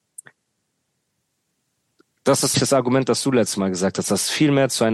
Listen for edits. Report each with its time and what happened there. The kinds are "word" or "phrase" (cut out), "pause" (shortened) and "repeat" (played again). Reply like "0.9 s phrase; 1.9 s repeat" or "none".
2.5 s word